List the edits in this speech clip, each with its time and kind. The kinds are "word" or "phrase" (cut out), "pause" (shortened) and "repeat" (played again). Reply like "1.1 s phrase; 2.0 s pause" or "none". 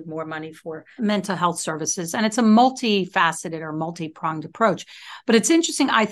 1.0 s word